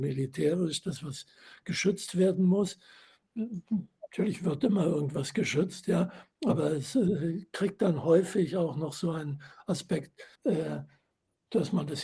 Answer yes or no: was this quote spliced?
yes